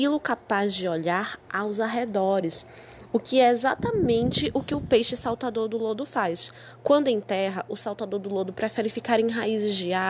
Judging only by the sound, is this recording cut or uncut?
uncut